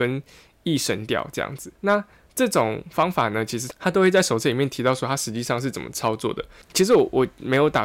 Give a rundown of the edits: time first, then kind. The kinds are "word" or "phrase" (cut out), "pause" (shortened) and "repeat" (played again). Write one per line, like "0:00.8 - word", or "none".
0:01.8 - pause